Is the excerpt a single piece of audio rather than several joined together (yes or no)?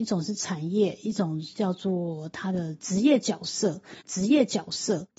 no